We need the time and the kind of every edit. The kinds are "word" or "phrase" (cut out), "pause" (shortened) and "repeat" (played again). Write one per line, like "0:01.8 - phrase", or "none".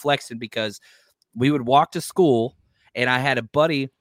none